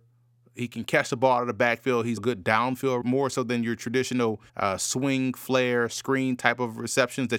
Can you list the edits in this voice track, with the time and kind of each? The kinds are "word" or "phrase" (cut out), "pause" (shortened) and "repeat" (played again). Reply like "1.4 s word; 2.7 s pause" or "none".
2.2 s word; 3.0 s word; 4.5 s pause